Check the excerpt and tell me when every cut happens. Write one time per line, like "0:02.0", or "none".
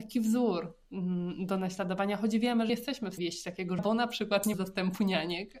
0:02.7
0:03.2
0:03.8
0:04.5